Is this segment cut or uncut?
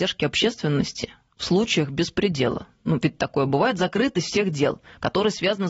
uncut